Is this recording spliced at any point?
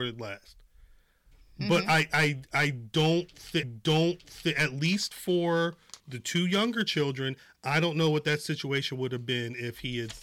yes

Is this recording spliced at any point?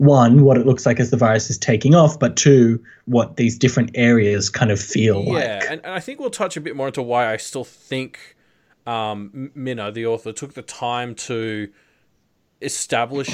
no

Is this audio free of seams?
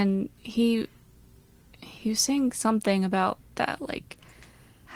no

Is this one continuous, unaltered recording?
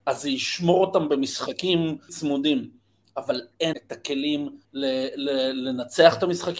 no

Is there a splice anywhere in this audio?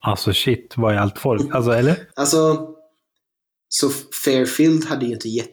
no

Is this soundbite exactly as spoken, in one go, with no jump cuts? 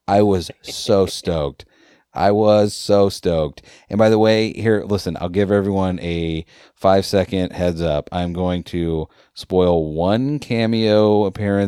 yes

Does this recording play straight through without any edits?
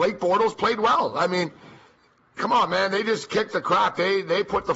yes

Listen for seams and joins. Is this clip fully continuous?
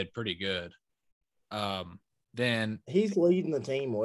no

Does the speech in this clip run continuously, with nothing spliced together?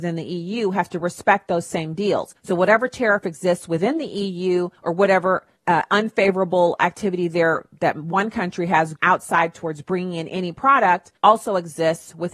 no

